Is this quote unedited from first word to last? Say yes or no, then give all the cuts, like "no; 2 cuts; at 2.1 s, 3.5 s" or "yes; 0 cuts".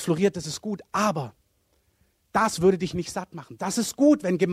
yes; 0 cuts